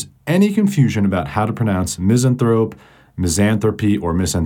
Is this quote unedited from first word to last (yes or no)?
yes